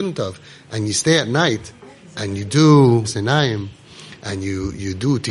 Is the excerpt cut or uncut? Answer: cut